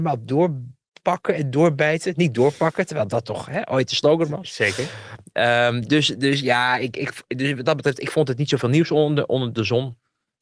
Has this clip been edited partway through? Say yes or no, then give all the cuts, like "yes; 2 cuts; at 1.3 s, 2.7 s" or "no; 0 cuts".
no; 0 cuts